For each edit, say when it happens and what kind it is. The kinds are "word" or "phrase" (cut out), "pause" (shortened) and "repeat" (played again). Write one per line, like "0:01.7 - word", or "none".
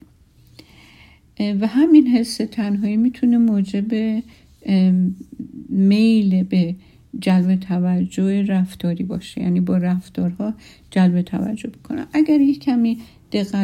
none